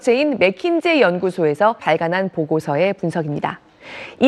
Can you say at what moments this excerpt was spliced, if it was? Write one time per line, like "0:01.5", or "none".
0:01.8